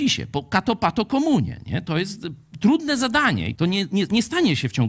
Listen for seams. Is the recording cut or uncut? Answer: cut